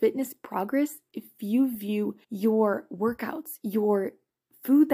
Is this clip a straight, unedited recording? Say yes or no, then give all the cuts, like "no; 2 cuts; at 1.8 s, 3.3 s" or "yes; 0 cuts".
no; 1 cut; at 2.2 s